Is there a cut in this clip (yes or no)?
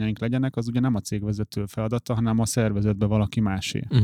no